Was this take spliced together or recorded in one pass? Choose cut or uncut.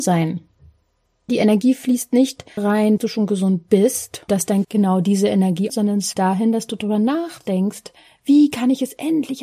cut